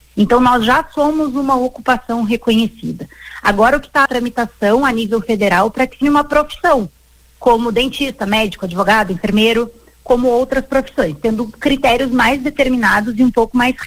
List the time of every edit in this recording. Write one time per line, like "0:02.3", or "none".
0:04.1
0:06.0